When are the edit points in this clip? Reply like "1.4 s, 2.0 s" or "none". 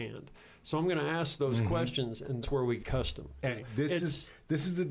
2.4 s, 2.8 s, 3.6 s